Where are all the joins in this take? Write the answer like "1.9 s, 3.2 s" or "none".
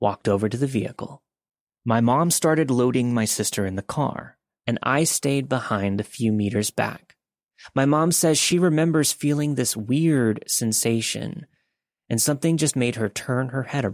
none